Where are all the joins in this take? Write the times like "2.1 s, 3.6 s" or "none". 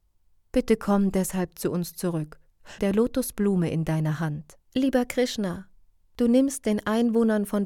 2.8 s, 4.7 s